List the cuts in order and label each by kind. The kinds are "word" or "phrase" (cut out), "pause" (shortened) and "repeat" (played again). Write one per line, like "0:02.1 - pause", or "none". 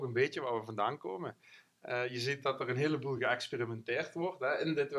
none